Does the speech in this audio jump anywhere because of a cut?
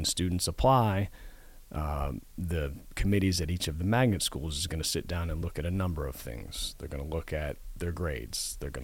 no; 0 cuts

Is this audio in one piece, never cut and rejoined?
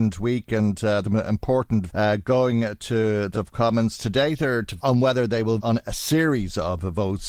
no; 5 cuts; at 1.0 s, 1.9 s, 3.3 s, 4.8 s, 5.6 s

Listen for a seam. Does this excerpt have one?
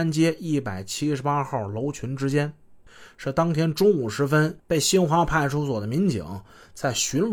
yes; 1 cut; at 4.6 s

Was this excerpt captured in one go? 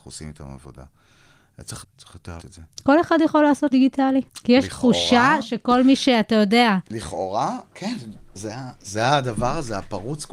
no; 4 cuts; at 1.8 s, 2.4 s, 3.7 s, 4.3 s

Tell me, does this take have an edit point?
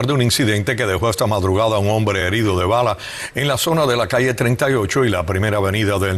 no; 0 cuts

